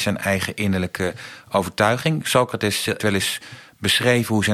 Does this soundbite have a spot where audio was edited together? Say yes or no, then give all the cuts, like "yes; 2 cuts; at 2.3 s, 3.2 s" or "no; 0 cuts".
yes; 1 cut; at 3.0 s